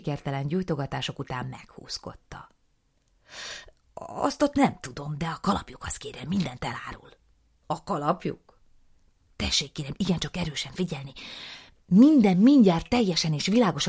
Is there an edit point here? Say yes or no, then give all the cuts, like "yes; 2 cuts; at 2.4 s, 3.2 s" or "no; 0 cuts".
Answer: no; 0 cuts